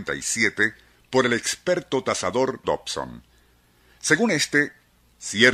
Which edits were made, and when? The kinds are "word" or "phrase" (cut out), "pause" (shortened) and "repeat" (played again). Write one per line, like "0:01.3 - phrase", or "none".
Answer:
0:02.6 - word